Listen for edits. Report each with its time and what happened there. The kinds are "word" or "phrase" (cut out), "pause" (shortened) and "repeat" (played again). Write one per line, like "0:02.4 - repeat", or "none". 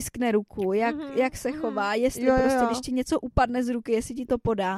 none